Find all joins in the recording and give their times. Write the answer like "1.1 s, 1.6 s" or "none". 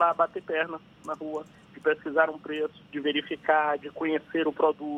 2.9 s